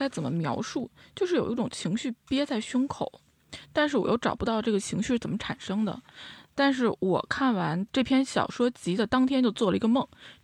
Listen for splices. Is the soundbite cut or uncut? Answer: uncut